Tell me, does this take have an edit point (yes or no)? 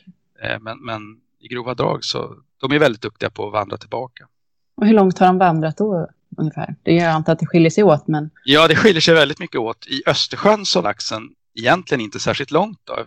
yes